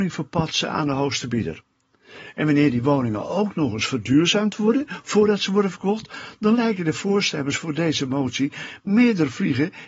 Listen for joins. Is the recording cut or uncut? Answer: uncut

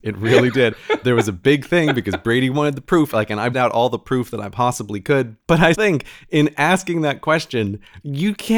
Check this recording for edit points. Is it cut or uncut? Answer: cut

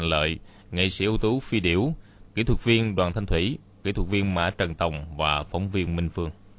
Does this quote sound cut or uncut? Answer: uncut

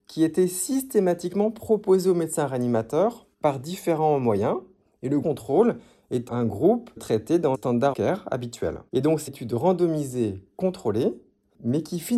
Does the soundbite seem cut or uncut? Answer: cut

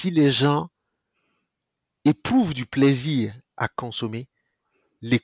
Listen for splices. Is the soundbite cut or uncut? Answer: uncut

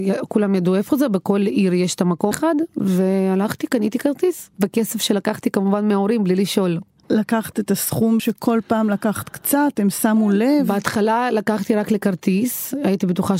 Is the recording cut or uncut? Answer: cut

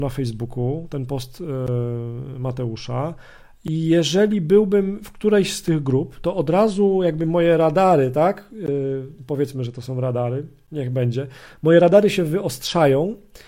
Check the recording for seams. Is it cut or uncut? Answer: uncut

